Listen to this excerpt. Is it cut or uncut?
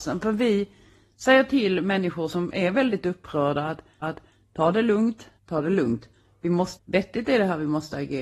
cut